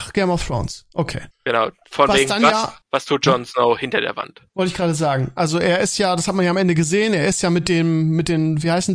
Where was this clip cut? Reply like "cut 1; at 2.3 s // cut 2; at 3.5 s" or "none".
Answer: cut 1; at 1.3 s // cut 2; at 2.8 s // cut 3; at 4.5 s